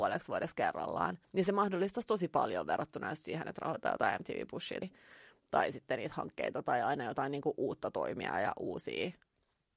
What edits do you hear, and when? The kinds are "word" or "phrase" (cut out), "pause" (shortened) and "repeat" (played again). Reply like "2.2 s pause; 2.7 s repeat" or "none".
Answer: 1.2 s pause; 4.8 s word